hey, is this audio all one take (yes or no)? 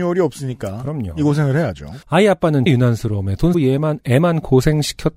no